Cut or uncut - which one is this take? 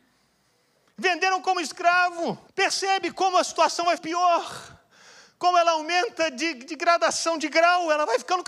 cut